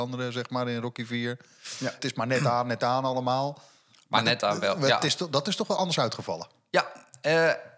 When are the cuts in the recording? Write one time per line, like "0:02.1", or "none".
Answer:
0:02.0